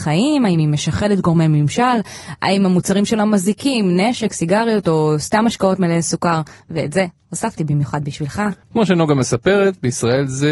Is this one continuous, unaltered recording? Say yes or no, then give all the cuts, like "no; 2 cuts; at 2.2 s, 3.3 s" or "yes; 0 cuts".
no; 1 cut; at 8.6 s